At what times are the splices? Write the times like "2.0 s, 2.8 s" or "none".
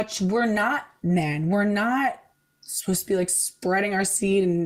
none